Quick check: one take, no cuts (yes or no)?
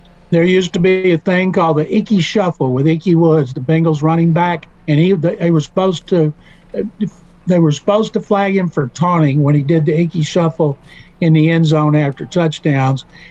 no